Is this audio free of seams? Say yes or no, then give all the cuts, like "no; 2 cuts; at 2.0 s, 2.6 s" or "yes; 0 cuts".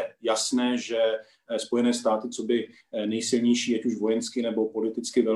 yes; 0 cuts